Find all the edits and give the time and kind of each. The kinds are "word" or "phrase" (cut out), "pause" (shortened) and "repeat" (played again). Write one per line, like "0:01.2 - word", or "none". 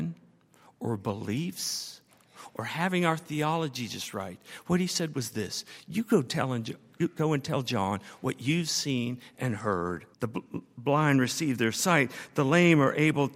0:10.1 - pause